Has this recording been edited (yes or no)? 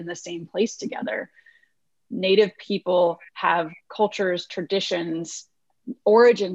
no